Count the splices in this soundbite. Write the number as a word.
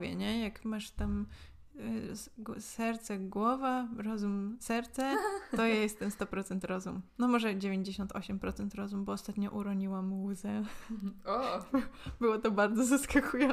zero